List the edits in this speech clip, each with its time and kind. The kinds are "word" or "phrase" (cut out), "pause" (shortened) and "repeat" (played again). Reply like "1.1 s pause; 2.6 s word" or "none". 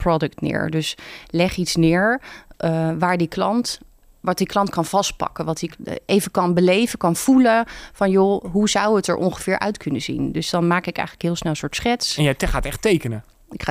none